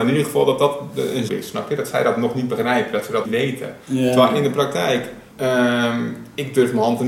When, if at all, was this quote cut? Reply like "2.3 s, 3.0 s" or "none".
1.3 s, 3.2 s, 3.8 s, 5.3 s